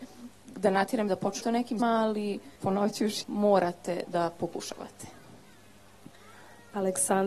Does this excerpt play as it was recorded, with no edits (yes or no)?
no